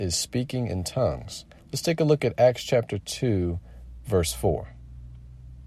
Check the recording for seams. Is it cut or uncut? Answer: uncut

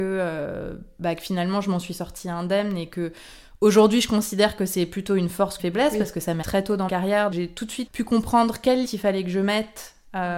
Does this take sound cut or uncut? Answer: cut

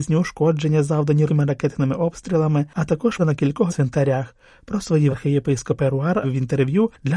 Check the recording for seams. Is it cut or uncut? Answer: cut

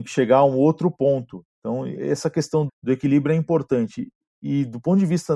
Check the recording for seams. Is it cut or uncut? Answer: cut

